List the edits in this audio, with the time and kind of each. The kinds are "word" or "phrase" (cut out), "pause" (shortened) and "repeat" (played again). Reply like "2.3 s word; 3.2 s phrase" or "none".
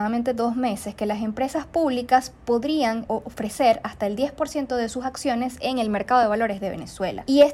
none